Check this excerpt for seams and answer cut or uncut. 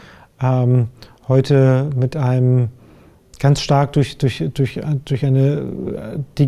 uncut